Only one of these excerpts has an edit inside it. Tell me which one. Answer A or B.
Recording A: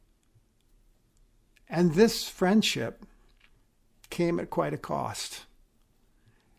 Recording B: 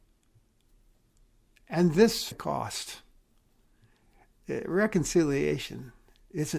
B